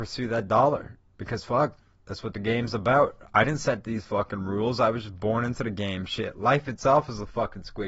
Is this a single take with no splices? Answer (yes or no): yes